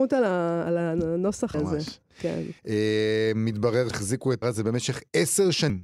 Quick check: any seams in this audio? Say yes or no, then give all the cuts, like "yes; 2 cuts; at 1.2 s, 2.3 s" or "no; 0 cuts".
yes; 4 cuts; at 1.5 s, 2.6 s, 3.9 s, 4.4 s